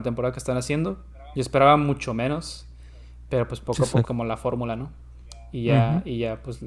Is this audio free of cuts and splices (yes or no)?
no